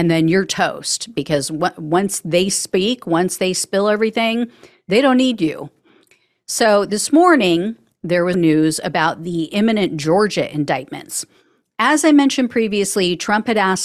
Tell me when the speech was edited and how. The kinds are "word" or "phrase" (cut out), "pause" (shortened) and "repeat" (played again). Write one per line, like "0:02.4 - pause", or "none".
0:08.3 - word